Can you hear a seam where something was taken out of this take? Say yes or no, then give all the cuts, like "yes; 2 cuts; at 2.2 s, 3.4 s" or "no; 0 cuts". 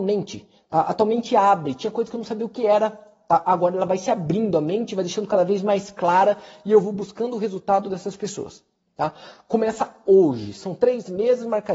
no; 0 cuts